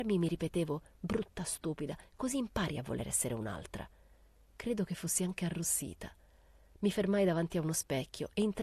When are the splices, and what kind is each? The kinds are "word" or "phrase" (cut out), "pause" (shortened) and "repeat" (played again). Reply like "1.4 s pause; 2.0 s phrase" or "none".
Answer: none